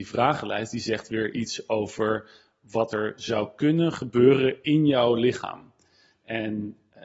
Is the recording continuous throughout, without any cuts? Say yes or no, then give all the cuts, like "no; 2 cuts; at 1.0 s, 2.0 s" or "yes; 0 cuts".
yes; 0 cuts